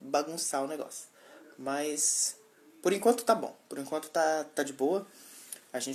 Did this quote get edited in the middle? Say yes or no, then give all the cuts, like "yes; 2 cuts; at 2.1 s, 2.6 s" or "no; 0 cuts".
no; 0 cuts